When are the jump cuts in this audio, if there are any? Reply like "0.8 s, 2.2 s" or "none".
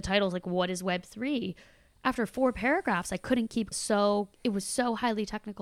3.7 s, 4.3 s